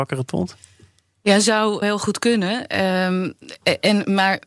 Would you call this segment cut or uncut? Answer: cut